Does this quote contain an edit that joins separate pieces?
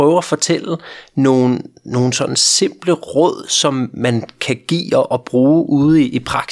no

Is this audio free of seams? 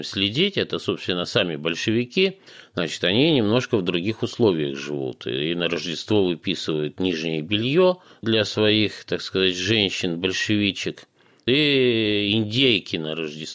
yes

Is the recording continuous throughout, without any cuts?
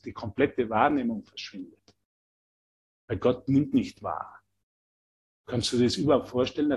yes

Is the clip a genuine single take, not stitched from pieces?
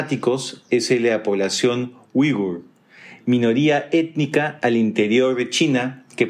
yes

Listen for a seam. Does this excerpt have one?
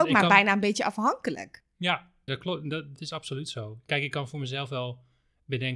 yes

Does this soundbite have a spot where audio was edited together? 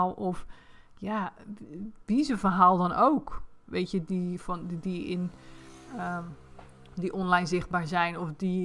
no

